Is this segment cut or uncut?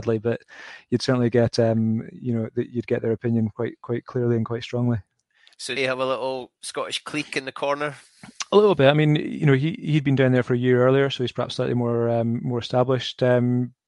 cut